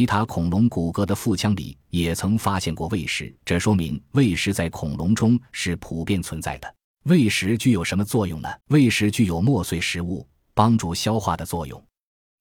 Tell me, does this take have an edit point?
yes; 3 cuts; at 3.4 s, 6.8 s, 8.6 s

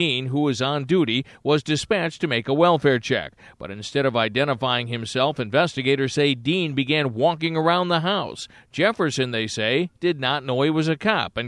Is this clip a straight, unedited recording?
yes; 0 cuts

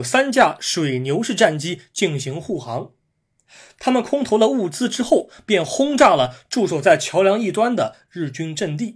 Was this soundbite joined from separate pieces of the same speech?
no; 0 cuts

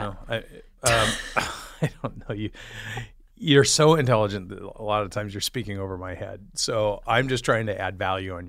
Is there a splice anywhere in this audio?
no; 0 cuts

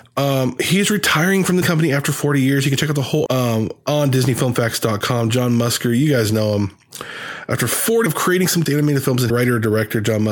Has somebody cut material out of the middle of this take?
yes; 5 cuts; at 1.6 s, 3.3 s, 8.1 s, 8.7 s, 9.3 s

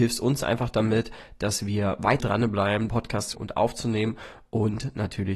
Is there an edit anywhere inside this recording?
yes; 3 cuts; at 2.2 s, 2.9 s, 3.3 s

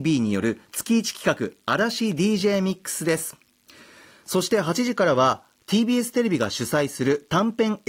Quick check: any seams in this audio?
no; 0 cuts

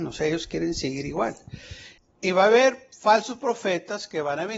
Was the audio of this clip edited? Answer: no; 0 cuts

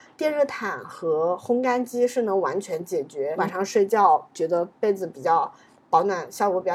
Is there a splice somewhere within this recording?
yes; 1 cut; at 3.4 s

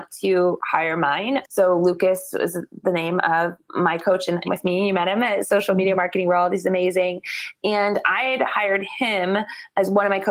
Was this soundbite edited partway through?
yes; 1 cut; at 4.4 s

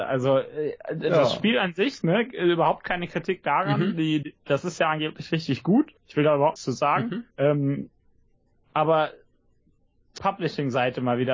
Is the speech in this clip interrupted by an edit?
yes; 5 cuts; at 4.2 s, 6.0 s, 6.6 s, 7.3 s, 10.2 s

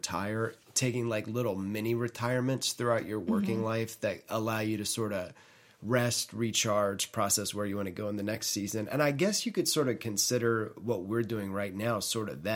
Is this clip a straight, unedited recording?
yes; 0 cuts

